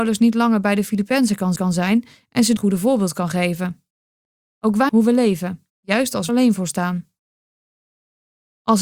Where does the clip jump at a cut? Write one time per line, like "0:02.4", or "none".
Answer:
0:01.6
0:02.6
0:04.9
0:05.7
0:06.3